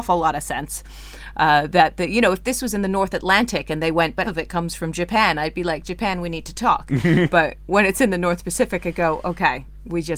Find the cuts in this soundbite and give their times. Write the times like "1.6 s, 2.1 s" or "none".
4.2 s